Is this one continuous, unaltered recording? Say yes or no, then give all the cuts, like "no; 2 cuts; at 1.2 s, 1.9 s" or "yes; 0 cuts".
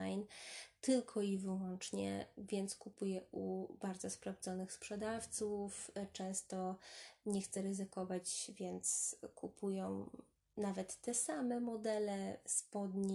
yes; 0 cuts